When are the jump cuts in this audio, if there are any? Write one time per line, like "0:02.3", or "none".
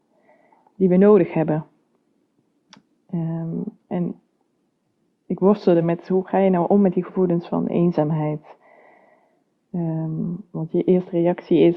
none